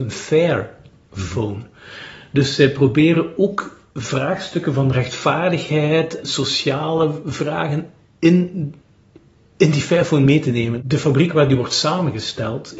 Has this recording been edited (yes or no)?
yes